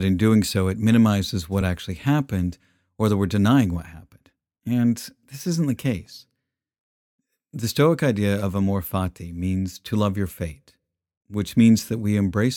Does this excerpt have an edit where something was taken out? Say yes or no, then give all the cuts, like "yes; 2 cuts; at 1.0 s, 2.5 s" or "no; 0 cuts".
no; 0 cuts